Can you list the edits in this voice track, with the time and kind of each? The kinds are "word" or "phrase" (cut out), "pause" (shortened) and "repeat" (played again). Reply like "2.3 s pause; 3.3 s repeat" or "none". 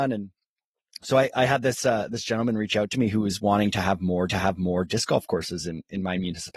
4.3 s repeat

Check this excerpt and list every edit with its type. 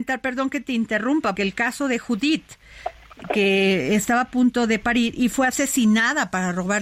1.4 s word

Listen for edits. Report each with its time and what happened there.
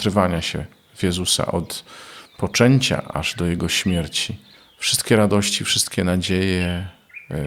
4.6 s pause

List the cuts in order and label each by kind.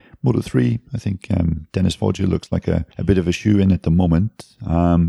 2.9 s pause

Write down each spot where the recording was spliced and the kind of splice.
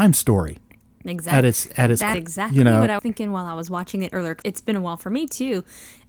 2.1 s word; 3.0 s word; 4.4 s word

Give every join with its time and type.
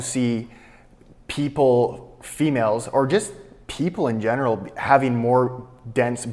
none

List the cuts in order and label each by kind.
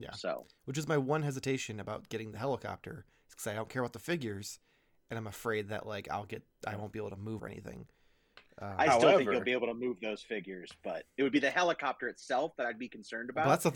7.4 s phrase; 11.1 s pause

